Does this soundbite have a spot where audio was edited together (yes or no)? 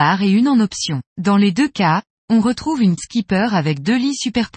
yes